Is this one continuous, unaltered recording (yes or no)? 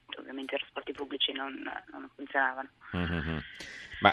yes